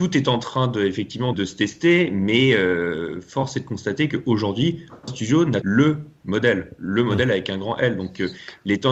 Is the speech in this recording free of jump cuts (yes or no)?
no